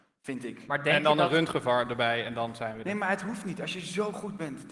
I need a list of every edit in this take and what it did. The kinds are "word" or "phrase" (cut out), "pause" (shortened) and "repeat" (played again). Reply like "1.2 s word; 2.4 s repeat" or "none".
none